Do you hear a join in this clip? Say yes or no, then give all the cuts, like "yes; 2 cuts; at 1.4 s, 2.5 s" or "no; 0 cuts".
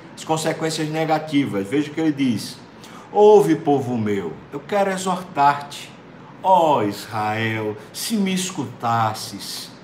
no; 0 cuts